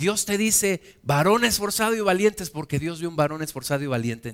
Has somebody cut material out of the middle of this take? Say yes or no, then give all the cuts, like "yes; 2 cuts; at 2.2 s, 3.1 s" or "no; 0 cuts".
no; 0 cuts